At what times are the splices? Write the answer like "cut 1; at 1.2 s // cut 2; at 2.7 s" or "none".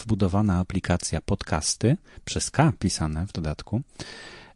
none